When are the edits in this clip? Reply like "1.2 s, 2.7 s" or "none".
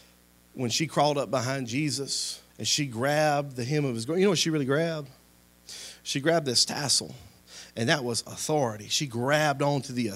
2.5 s